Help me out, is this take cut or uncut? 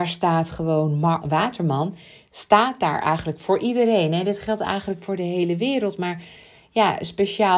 cut